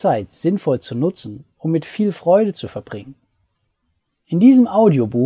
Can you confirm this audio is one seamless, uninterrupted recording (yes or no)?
yes